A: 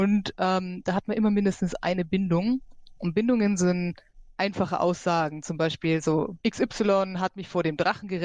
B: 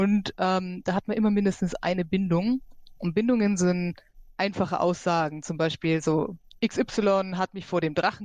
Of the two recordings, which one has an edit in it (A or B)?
A